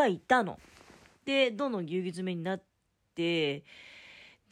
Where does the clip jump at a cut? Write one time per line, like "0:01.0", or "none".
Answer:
none